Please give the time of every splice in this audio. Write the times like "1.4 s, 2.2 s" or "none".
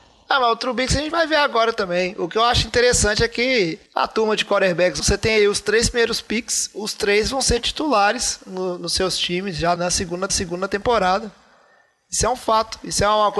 3.9 s, 5.0 s, 9.8 s, 10.3 s